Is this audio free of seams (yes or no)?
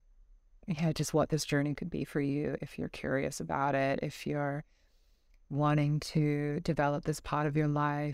yes